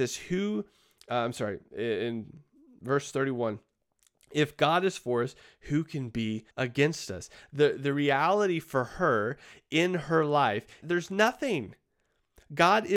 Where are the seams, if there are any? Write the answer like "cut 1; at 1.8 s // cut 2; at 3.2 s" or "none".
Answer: cut 1; at 6.5 s // cut 2; at 10.8 s